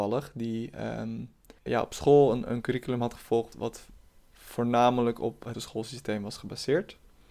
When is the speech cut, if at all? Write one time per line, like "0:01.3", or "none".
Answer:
0:01.7
0:03.5
0:05.5